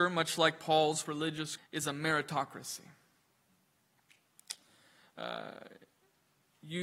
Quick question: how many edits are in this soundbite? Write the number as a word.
two